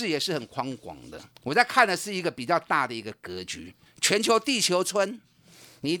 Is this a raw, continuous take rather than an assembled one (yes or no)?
no